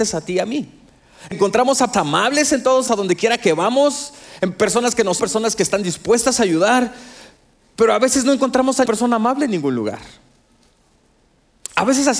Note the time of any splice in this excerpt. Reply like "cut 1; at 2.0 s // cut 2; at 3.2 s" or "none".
cut 1; at 1.3 s // cut 2; at 1.9 s // cut 3; at 2.9 s // cut 4; at 5.2 s // cut 5; at 8.9 s